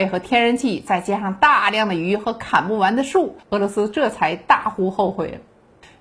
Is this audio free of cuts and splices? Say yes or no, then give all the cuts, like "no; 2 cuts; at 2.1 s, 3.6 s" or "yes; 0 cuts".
no; 1 cut; at 3.4 s